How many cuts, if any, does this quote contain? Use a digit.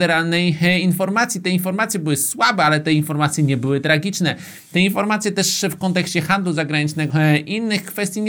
1